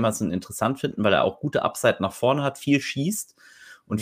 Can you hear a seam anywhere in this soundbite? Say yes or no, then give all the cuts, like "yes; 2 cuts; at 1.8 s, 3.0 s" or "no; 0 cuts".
no; 0 cuts